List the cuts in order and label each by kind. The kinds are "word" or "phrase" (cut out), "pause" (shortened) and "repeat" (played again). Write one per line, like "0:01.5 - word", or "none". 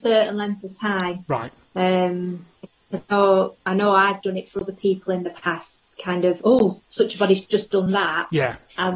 none